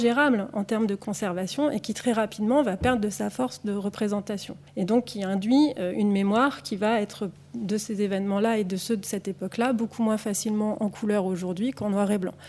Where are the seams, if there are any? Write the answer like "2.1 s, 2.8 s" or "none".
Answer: 4.7 s